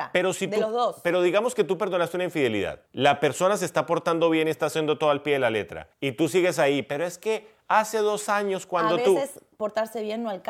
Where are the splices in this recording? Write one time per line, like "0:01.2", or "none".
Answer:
0:02.9
0:05.9